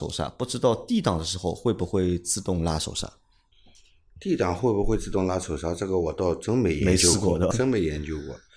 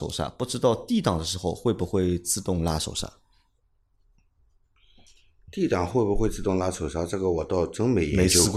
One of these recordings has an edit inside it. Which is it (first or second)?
first